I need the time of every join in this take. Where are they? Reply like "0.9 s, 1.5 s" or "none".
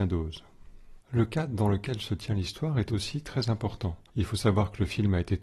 1.0 s, 4.1 s